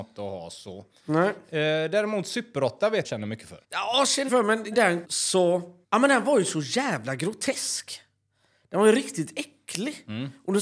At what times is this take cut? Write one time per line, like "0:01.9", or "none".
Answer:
0:03.0
0:03.6
0:04.3
0:04.7
0:05.0
0:05.8